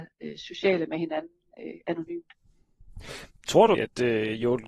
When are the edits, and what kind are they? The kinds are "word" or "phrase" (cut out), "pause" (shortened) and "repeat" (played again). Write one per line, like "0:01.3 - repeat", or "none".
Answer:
0:03.7 - word